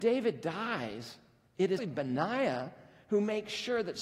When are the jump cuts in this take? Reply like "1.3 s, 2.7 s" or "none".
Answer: 1.8 s